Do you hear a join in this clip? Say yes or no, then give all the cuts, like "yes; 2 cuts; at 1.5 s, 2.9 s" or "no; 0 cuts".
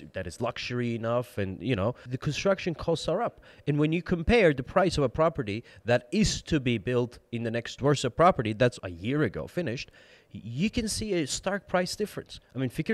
yes; 3 cuts; at 2.1 s, 7.8 s, 8.8 s